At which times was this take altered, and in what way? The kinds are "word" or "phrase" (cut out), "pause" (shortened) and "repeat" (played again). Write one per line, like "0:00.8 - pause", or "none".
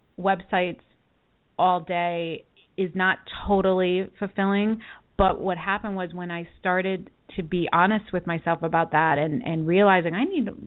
none